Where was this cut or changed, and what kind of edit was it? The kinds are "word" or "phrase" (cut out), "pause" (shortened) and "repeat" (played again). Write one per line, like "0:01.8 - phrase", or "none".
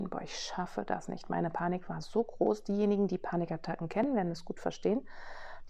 none